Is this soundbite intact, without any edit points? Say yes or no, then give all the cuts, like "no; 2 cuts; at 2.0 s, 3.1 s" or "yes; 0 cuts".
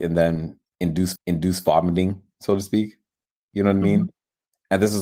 no; 1 cut; at 1.2 s